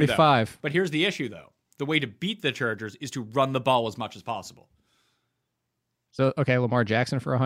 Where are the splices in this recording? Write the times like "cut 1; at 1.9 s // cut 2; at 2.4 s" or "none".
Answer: none